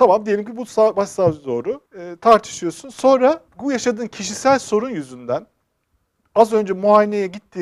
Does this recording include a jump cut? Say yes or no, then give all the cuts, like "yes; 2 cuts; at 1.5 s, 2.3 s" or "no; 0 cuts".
yes; 2 cuts; at 1.9 s, 3.5 s